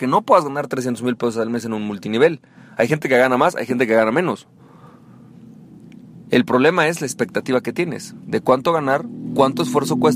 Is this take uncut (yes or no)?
yes